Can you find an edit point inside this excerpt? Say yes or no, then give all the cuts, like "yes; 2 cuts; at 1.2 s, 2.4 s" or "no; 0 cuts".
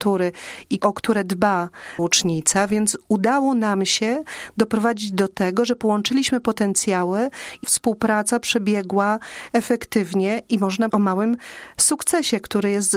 yes; 4 cuts; at 2.0 s, 7.6 s, 9.5 s, 10.9 s